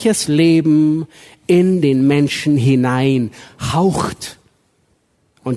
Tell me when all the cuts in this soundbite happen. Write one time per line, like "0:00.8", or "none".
none